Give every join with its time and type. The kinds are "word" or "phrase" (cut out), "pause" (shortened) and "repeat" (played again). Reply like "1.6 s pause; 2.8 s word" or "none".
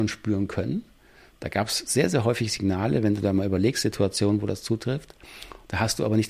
none

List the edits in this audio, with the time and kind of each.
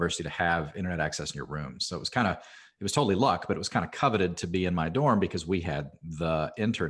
none

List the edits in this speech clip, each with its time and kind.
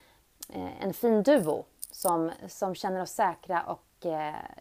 none

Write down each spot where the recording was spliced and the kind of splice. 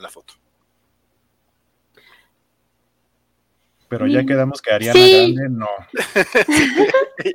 none

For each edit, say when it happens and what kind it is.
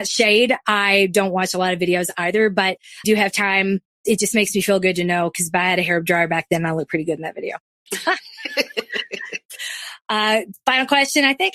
3.0 s phrase

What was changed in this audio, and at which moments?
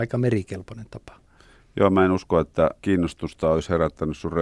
2.8 s pause

